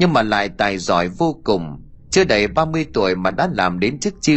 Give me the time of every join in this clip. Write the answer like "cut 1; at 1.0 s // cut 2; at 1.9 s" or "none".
none